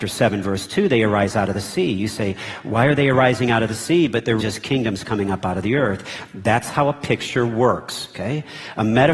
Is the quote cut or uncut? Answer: cut